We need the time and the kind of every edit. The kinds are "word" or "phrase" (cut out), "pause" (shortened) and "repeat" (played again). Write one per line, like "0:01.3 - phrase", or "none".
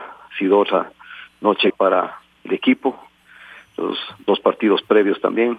0:01.7 - word